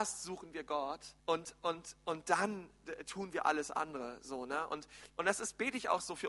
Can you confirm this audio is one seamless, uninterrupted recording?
no; 1 cut; at 1.2 s

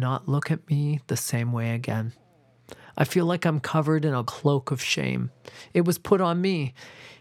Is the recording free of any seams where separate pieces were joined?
no; 1 cut; at 4.2 s

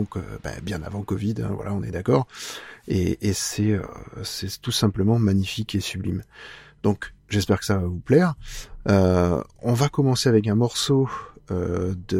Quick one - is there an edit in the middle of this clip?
yes; 1 cut; at 7.2 s

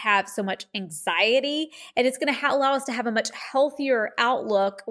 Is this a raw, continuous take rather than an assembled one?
yes; 0 cuts

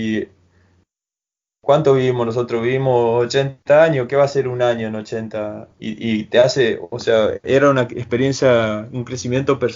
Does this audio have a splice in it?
yes; 1 cut; at 5.7 s

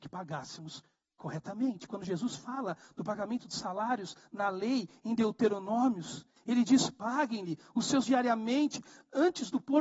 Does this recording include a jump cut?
yes; 1 cut; at 8.0 s

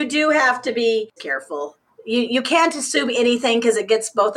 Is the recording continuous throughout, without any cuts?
no; 1 cut; at 1.2 s

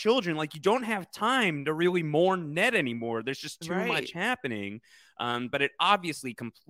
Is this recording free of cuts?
yes; 0 cuts

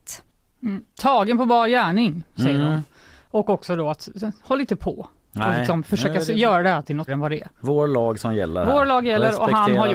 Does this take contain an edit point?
yes; 1 cut; at 7.1 s

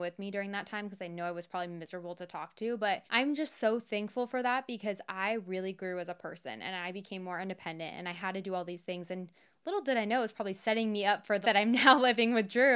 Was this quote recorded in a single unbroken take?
no; 2 cuts; at 3.1 s, 11.4 s

